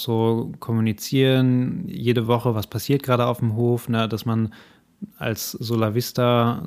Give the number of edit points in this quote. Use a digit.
0